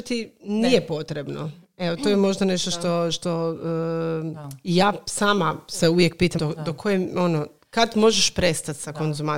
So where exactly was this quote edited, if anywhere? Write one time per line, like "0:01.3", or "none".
0:06.4